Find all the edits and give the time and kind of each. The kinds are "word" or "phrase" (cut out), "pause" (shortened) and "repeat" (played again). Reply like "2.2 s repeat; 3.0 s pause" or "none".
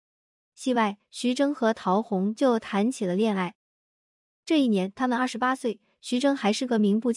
none

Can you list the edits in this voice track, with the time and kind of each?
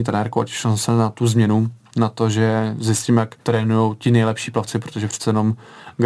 3.4 s pause

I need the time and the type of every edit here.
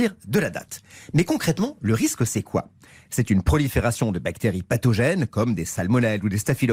none

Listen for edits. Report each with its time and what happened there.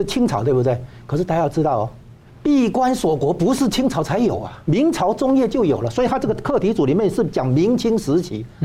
2.3 s pause; 4.6 s word

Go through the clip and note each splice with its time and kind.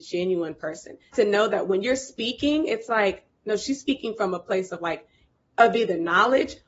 1.1 s phrase

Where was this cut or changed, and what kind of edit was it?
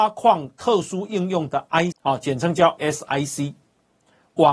1.9 s word; 2.8 s word

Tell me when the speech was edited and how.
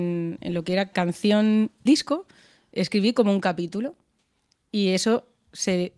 0.9 s word; 1.9 s word

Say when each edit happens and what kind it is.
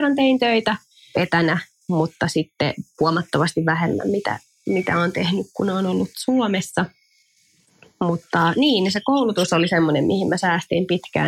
none

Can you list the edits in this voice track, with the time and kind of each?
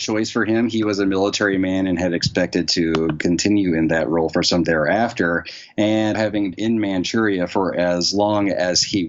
4.6 s word; 6.1 s word; 6.5 s word

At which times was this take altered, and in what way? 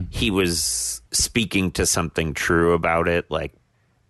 1.1 s pause

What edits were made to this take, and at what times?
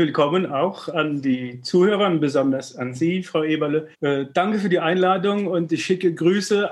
3.9 s pause

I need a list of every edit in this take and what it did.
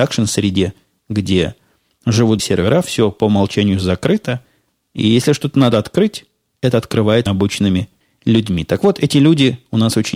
2.4 s word; 7.3 s word

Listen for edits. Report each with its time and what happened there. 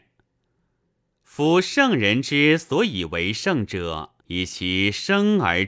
4.2 s pause

